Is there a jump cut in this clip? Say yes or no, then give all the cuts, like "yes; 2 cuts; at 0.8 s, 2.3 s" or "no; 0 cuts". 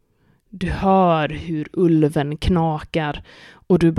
no; 0 cuts